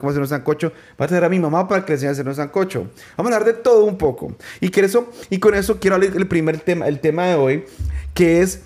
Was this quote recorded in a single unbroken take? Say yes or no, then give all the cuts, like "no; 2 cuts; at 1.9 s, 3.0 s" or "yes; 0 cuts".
yes; 0 cuts